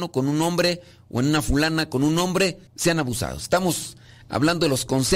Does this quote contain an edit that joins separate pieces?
yes; 1 cut; at 2.7 s

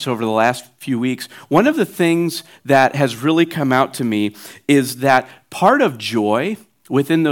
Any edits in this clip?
no; 0 cuts

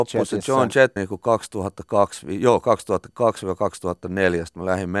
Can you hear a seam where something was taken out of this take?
yes; 1 cut; at 1.0 s

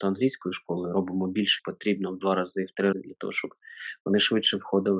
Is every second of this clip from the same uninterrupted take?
no; 2 cuts; at 1.6 s, 2.9 s

